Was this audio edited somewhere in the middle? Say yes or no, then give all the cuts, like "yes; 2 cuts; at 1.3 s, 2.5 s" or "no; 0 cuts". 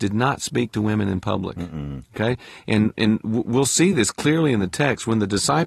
no; 0 cuts